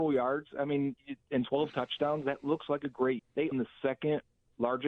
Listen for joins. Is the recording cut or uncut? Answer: cut